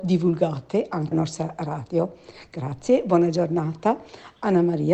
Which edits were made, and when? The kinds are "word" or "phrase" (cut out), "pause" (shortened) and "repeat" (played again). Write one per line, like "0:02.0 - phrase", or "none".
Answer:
0:01.1 - phrase